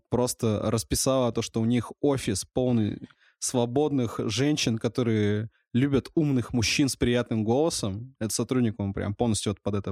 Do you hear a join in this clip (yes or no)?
no